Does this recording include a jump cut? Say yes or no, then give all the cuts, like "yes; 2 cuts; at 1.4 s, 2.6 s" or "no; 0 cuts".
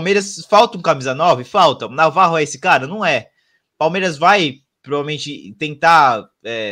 no; 0 cuts